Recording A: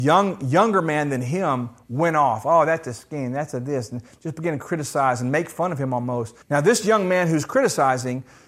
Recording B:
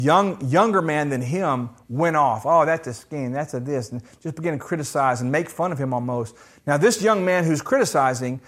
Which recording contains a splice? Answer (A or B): A